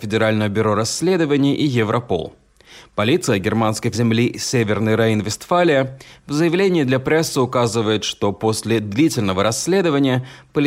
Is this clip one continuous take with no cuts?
no; 1 cut; at 3.9 s

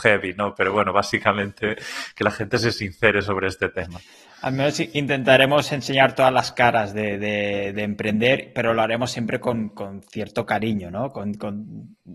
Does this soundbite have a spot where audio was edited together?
no; 0 cuts

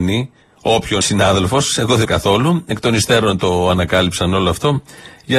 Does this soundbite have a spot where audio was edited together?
yes; 2 cuts; at 1.0 s, 2.0 s

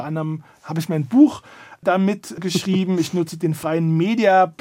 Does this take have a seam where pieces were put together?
no; 0 cuts

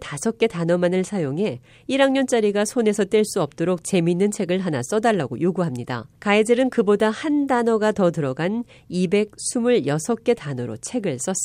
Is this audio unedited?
no; 1 cut; at 6.2 s

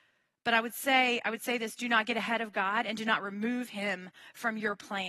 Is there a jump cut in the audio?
no; 0 cuts

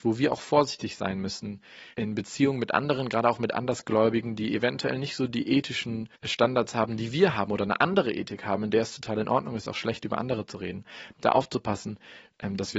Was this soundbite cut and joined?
yes; 2 cuts; at 1.9 s, 6.1 s

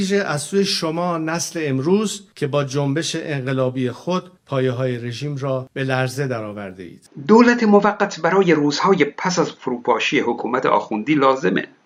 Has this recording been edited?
yes; 1 cut; at 2.3 s

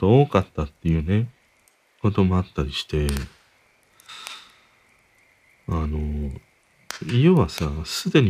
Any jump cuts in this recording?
no; 0 cuts

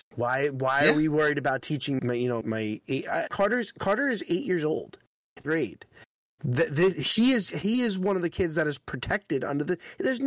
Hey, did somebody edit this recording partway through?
yes; 5 cuts; at 2.0 s, 2.4 s, 3.3 s, 5.5 s, 7.5 s

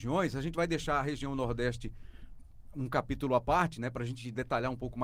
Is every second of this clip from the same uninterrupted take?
yes; 0 cuts

